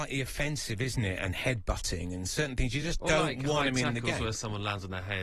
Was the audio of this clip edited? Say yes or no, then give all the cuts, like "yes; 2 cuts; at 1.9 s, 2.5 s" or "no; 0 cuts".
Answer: no; 0 cuts